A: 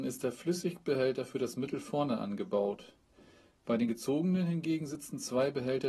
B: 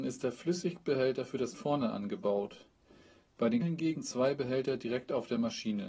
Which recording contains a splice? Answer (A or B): B